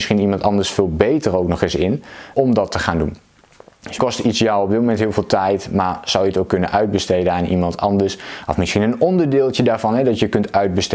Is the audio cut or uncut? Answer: cut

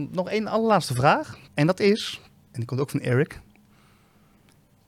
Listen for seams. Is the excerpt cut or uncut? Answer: cut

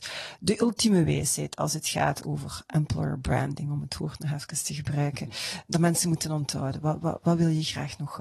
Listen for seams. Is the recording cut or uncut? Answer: cut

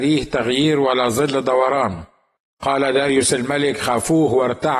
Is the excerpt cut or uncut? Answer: uncut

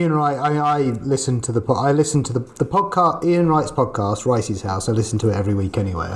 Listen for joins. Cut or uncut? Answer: uncut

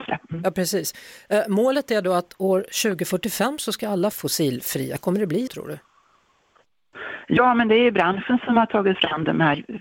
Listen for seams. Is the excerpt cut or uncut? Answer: cut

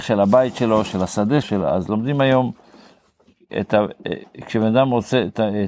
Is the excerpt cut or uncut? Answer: cut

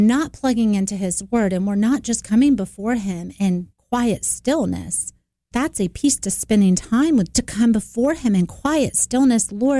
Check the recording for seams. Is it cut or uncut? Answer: cut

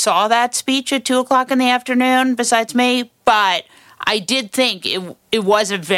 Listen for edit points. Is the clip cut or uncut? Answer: uncut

